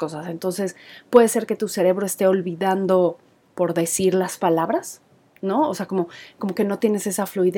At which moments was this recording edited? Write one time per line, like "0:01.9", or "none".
none